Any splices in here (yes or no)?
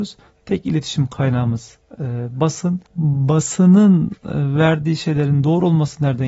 yes